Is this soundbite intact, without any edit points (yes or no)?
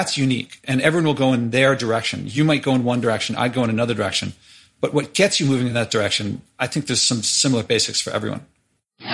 yes